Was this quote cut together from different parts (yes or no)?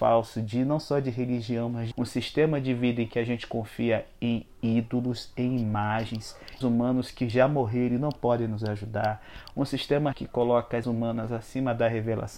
yes